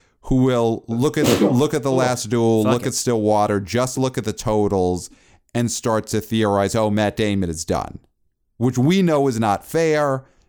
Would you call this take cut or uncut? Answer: uncut